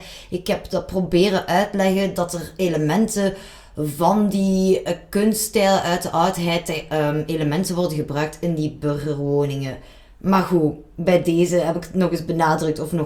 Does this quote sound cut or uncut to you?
uncut